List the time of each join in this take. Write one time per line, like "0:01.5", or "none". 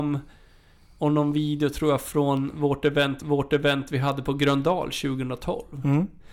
0:03.2